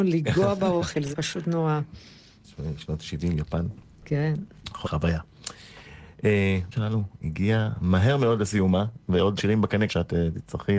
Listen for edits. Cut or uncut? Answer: cut